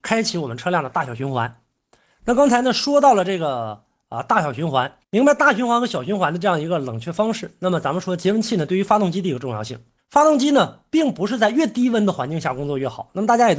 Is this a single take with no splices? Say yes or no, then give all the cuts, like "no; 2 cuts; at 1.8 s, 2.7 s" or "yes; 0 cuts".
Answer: no; 2 cuts; at 5.0 s, 10.0 s